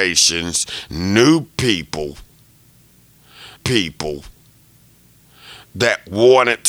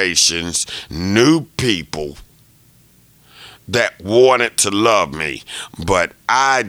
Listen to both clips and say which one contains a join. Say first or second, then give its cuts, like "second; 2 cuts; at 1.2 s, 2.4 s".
first; 1 cut; at 3.6 s